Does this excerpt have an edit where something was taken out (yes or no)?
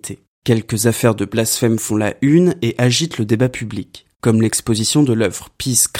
no